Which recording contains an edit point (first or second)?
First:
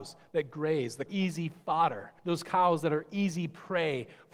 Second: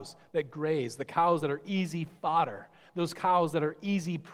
first